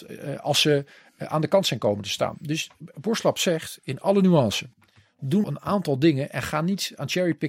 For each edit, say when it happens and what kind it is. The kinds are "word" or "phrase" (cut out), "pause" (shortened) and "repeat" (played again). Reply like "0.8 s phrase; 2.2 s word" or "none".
5.4 s word